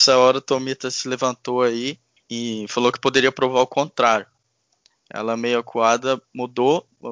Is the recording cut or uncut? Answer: uncut